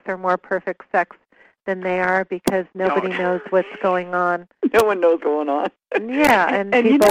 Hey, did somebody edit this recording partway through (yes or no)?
yes